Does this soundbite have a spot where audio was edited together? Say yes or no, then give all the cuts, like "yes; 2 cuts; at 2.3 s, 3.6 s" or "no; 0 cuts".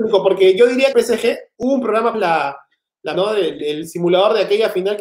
yes; 5 cuts; at 0.9 s, 1.6 s, 2.1 s, 3.1 s, 3.6 s